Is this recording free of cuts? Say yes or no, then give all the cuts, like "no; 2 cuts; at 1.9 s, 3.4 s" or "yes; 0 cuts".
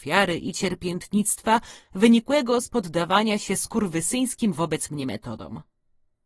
yes; 0 cuts